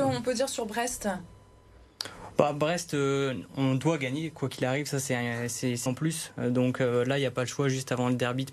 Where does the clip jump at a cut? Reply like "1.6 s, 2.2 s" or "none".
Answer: 5.9 s